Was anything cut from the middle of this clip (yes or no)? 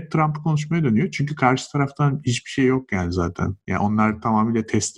no